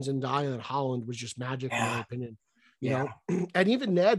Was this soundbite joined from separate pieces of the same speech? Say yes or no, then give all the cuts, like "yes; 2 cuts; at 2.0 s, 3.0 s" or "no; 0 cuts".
no; 0 cuts